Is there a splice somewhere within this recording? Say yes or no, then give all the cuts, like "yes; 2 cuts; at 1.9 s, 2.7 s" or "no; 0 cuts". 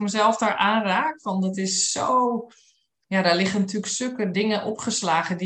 no; 0 cuts